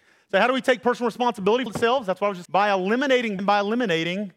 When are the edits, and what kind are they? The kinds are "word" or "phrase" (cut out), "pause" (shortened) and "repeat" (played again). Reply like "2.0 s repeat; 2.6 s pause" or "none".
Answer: 1.7 s word; 2.4 s word; 3.4 s word